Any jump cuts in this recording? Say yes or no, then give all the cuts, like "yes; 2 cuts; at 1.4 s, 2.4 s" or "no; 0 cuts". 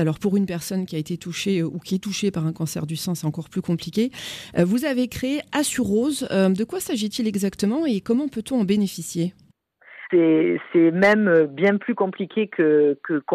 yes; 1 cut; at 10.1 s